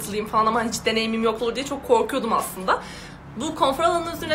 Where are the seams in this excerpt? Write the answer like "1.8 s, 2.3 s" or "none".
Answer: 1.4 s